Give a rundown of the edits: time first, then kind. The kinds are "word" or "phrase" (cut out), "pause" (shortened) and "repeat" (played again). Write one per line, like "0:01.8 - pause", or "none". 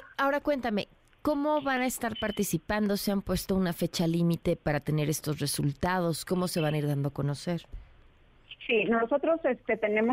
none